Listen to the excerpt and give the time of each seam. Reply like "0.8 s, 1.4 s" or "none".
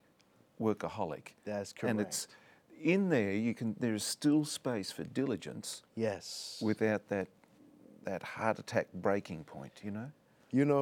none